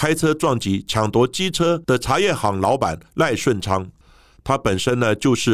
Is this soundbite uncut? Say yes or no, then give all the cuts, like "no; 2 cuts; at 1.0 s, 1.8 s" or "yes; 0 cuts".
yes; 0 cuts